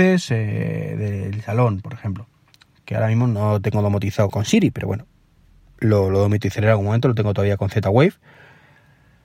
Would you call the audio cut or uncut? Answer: cut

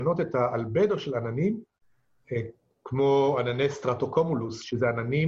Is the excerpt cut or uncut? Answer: uncut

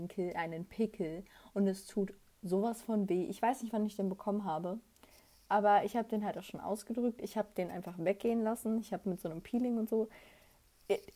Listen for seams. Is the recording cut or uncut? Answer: uncut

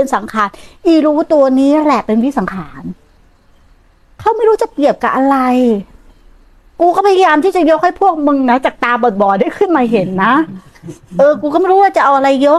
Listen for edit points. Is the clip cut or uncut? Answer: uncut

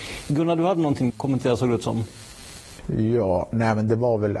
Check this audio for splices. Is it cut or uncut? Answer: cut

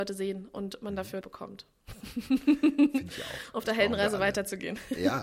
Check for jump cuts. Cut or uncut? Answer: cut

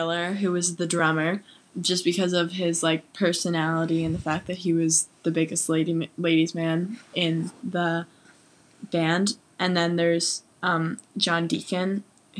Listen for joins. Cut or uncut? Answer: uncut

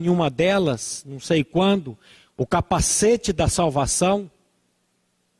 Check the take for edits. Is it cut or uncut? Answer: uncut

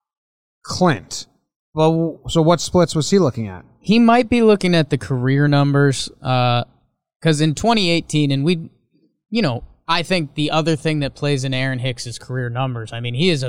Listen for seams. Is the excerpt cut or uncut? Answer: uncut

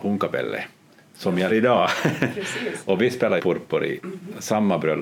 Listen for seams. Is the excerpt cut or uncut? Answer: cut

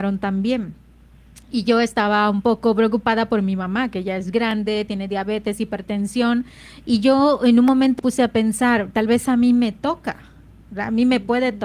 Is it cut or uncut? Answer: cut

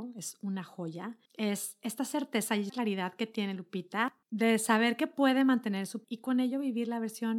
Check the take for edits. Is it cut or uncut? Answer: cut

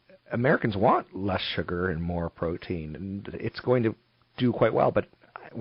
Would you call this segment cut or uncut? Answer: uncut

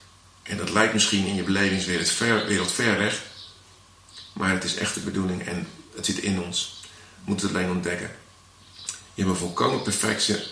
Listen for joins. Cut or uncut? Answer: uncut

